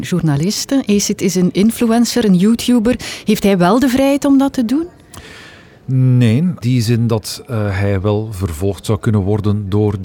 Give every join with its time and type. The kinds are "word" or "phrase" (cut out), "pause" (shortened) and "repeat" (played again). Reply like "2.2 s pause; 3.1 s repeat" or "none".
6.6 s word